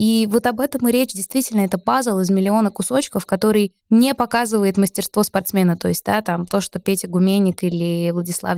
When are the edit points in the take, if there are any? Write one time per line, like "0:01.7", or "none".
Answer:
0:03.8